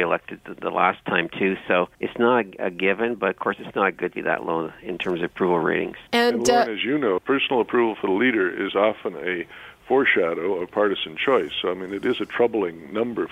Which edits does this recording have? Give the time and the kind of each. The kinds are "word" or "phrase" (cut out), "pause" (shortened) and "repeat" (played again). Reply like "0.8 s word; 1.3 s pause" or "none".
1.9 s pause; 4.1 s phrase; 6.1 s pause; 7.2 s word

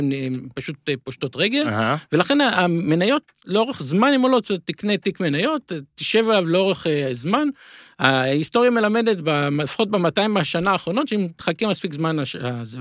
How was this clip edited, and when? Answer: none

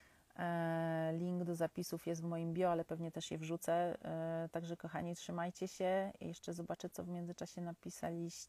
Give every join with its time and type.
none

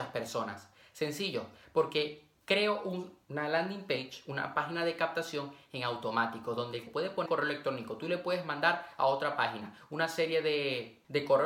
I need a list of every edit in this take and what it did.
6.9 s word; 7.3 s word

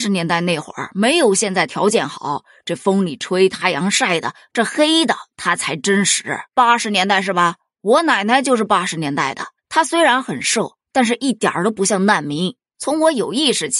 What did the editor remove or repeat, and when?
6.5 s pause; 9.6 s pause

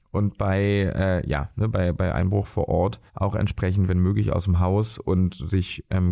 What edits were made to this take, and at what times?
3.1 s pause

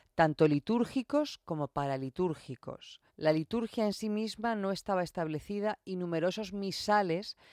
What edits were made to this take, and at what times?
3.1 s pause

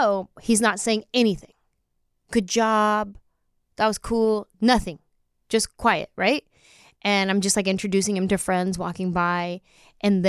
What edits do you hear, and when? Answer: none

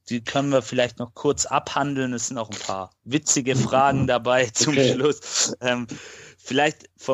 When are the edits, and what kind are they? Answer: none

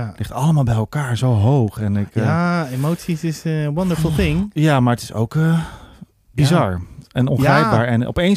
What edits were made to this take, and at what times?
none

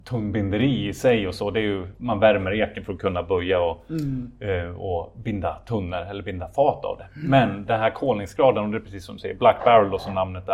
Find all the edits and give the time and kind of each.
1.9 s word

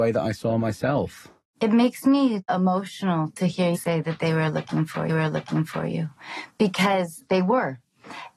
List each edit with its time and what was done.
3.7 s word; 5.1 s repeat

